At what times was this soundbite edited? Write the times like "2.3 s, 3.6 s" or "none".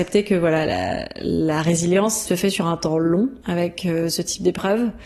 2.3 s, 3.4 s